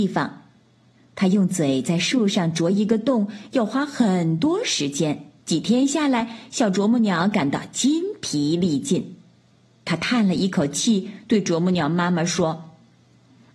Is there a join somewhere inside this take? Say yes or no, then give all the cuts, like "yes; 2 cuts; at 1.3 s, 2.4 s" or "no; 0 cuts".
yes; 1 cut; at 5.4 s